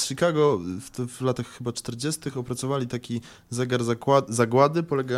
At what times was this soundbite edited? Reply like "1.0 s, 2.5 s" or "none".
none